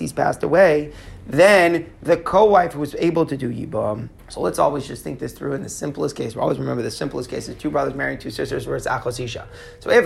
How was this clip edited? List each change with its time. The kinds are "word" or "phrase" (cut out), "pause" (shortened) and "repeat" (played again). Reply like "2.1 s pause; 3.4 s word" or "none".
4.2 s pause